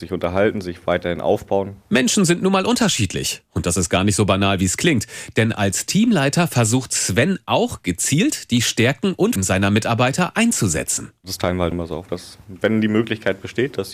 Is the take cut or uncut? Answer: cut